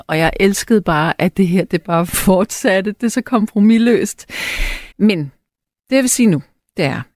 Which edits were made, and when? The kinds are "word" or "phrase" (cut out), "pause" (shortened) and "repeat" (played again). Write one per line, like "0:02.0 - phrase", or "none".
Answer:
0:04.9 - pause

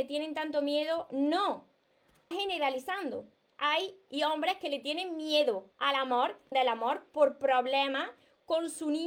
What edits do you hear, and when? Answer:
0:02.3 - word
0:04.1 - word
0:05.7 - pause
0:06.5 - word

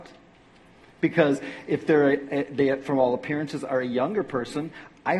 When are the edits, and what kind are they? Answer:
none

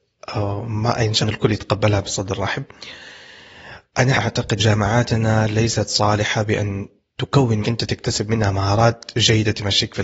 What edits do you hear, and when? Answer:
0:01.2 - word
0:04.1 - word
0:04.6 - word
0:07.6 - phrase

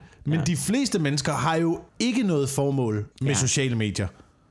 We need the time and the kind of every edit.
0:01.9 - pause
0:03.1 - pause

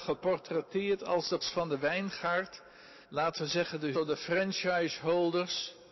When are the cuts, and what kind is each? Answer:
0:01.4 - word
0:03.0 - pause
0:03.9 - word

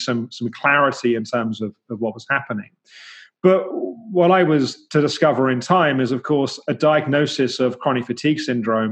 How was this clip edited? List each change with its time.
none

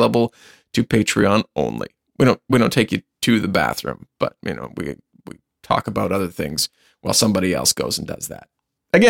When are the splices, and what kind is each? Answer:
none

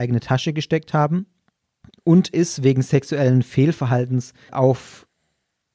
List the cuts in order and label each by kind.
0:02.3 - word
0:04.5 - word

